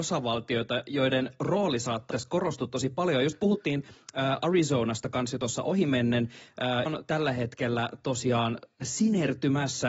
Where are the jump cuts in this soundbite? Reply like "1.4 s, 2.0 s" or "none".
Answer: 2.1 s, 6.9 s